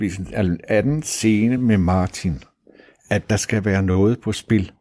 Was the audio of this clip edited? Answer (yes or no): no